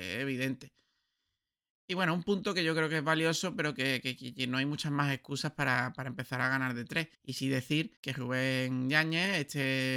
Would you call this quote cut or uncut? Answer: cut